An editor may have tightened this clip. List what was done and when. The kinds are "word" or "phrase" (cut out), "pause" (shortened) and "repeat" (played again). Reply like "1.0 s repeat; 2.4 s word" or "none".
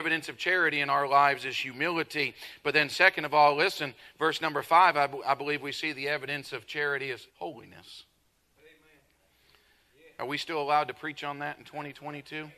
7.3 s pause